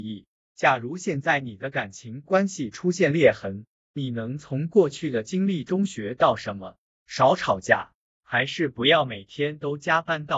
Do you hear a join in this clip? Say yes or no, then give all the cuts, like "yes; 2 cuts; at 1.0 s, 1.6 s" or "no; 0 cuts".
no; 0 cuts